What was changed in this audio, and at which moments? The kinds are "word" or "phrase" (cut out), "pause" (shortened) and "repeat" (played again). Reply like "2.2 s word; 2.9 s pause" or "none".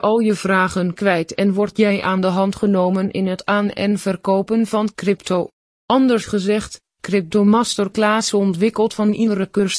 none